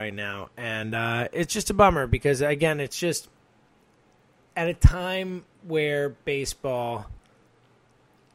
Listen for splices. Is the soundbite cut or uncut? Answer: uncut